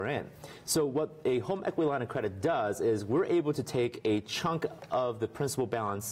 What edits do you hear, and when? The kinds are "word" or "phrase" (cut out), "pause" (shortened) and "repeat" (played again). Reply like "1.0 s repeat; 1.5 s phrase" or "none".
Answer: none